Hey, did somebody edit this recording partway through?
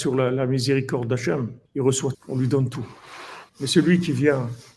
yes; 3 cuts; at 1.7 s, 2.1 s, 3.5 s

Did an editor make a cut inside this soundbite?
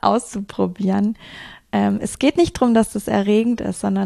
no; 0 cuts

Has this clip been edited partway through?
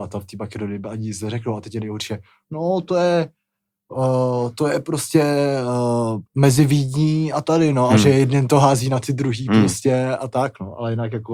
yes; 1 cut; at 6.3 s

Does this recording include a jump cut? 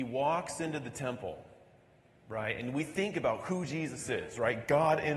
no; 0 cuts

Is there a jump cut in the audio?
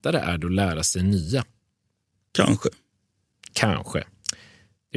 no; 0 cuts

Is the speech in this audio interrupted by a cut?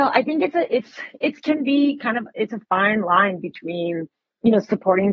no; 0 cuts

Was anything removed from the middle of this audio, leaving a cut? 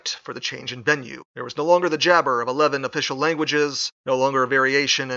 yes; 2 cuts; at 1.3 s, 4.0 s

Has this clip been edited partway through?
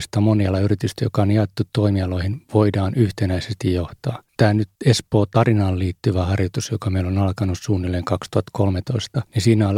yes; 2 cuts; at 4.3 s, 4.8 s

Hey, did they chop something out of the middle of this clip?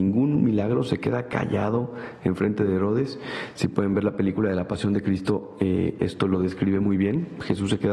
no; 0 cuts

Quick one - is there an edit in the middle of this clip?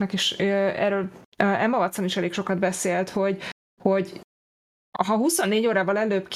no; 0 cuts

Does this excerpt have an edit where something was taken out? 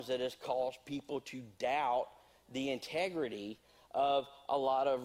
no; 0 cuts

